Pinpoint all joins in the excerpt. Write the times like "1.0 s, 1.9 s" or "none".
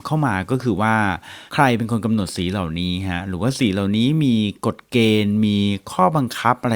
1.5 s